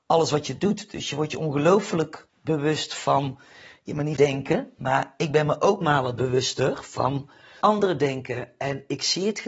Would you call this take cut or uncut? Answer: cut